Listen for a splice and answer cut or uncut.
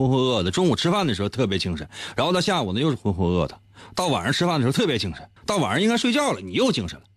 cut